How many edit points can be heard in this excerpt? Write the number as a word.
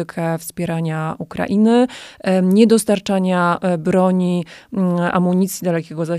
zero